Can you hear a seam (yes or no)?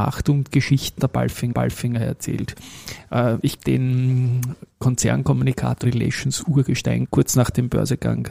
yes